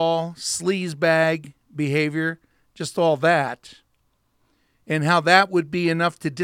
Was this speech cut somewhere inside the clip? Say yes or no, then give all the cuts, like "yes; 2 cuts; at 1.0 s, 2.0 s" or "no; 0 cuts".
no; 0 cuts